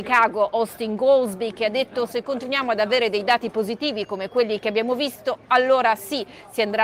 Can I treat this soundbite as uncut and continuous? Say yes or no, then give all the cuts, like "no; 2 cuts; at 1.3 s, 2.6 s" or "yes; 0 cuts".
yes; 0 cuts